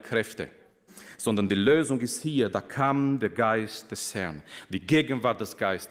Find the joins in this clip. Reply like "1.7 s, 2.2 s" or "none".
none